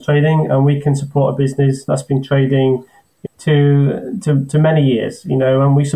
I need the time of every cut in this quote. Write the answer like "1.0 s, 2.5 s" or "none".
3.2 s

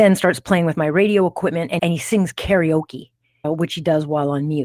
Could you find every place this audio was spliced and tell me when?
1.8 s, 3.4 s

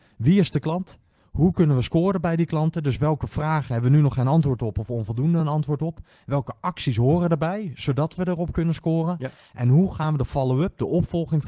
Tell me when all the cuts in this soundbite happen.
none

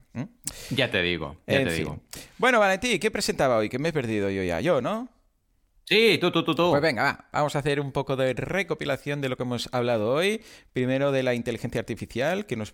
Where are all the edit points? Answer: none

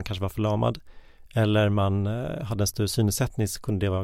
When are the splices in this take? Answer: none

